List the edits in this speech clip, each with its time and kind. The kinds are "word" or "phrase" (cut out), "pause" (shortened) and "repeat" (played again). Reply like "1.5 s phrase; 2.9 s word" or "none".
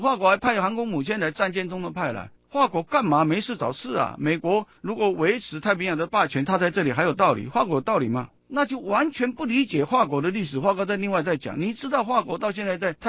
2.3 s pause; 4.8 s pause; 8.4 s pause